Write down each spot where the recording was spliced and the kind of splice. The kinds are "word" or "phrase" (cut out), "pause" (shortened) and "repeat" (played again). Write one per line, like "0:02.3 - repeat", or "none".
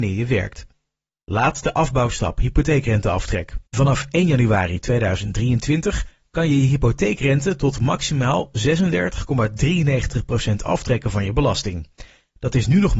0:03.7 - pause